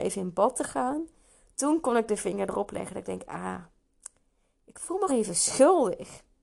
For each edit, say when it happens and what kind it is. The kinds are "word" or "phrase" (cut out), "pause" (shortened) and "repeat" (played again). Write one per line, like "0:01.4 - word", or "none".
0:05.1 - word